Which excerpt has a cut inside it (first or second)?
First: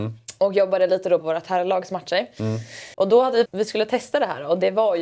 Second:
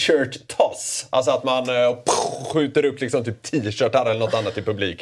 first